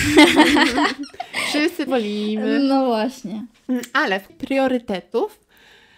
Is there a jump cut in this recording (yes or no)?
yes